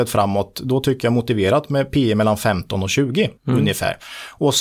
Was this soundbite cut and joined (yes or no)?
yes